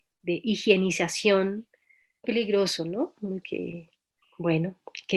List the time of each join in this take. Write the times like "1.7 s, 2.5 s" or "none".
2.2 s, 3.4 s, 4.2 s

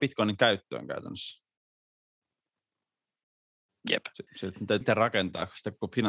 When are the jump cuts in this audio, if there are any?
4.3 s, 4.8 s

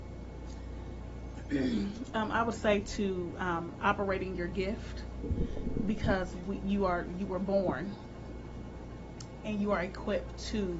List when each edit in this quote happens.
none

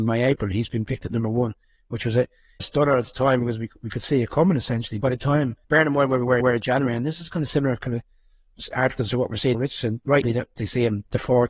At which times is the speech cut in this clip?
2.6 s, 5.0 s, 5.6 s, 6.4 s, 9.5 s, 10.2 s

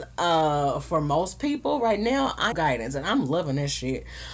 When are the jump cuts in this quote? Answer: 2.5 s

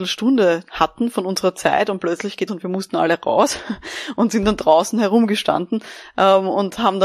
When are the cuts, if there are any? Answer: 2.5 s

